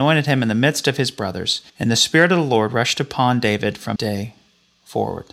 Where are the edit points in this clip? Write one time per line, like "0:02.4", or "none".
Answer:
0:01.7
0:04.0